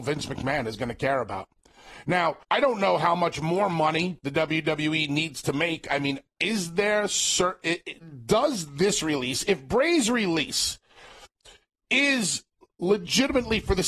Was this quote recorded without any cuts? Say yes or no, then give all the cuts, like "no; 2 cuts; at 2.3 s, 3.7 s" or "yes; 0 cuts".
no; 1 cut; at 2.4 s